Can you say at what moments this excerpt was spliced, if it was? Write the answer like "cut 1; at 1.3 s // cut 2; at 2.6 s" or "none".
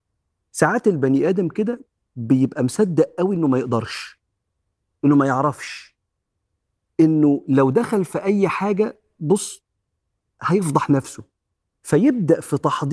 none